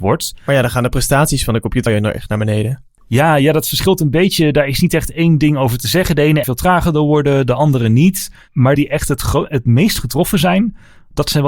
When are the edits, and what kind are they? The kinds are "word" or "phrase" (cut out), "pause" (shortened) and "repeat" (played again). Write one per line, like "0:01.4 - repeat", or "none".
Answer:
0:01.9 - word
0:06.4 - phrase
0:08.8 - word